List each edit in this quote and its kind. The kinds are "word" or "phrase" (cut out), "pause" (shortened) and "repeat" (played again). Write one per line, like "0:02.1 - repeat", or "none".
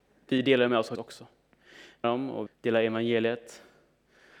0:00.9 - word
0:02.0 - phrase
0:02.5 - word